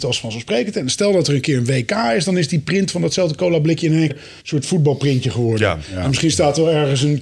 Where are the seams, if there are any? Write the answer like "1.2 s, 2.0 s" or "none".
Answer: 4.1 s, 4.4 s